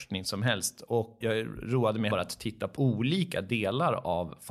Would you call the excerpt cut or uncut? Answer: cut